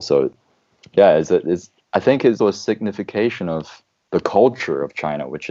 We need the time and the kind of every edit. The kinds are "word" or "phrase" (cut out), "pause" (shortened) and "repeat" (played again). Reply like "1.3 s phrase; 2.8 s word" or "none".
2.4 s word; 3.9 s pause

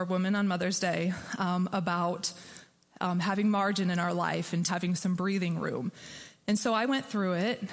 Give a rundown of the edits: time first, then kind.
4.7 s phrase

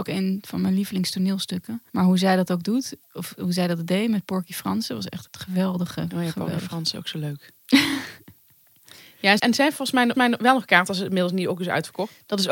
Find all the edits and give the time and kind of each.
1.9 s pause; 3.0 s pause; 5.3 s word; 9.4 s word; 10.1 s repeat

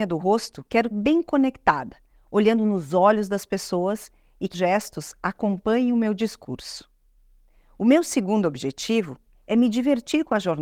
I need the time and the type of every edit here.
0.9 s word; 4.5 s word

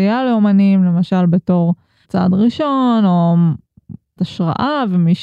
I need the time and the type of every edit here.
2.0 s word; 4.2 s word

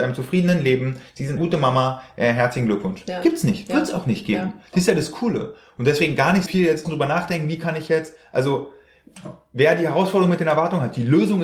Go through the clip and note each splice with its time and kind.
1.4 s word; 6.5 s word; 6.8 s word

